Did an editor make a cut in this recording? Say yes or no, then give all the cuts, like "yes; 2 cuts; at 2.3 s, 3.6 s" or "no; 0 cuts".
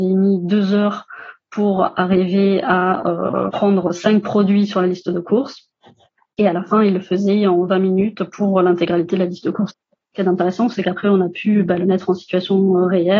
no; 0 cuts